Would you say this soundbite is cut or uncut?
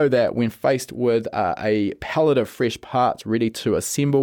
uncut